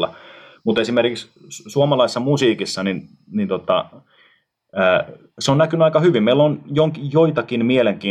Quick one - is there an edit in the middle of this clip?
no; 0 cuts

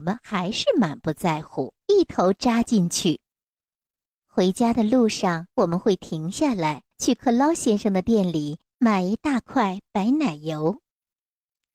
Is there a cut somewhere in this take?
yes; 5 cuts; at 1.8 s, 3.9 s, 5.5 s, 6.9 s, 8.7 s

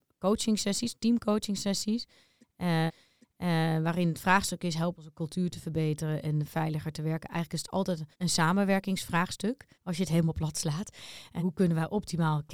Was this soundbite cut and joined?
yes; 5 cuts; at 2.9 s, 5.0 s, 8.1 s, 9.7 s, 11.4 s

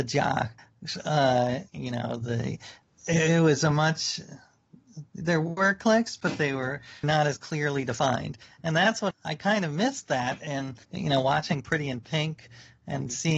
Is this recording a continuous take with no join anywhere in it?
no; 4 cuts; at 1.7 s, 7.0 s, 9.1 s, 10.8 s

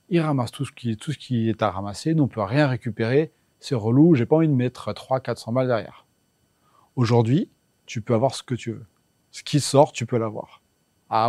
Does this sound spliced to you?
no; 0 cuts

